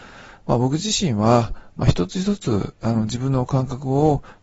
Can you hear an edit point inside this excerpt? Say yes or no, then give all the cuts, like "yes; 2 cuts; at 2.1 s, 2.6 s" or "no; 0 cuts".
no; 0 cuts